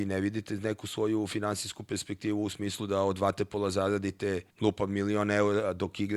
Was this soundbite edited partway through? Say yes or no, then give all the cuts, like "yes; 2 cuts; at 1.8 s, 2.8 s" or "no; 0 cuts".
yes; 1 cut; at 4.5 s